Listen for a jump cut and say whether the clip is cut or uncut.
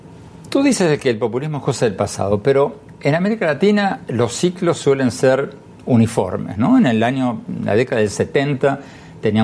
uncut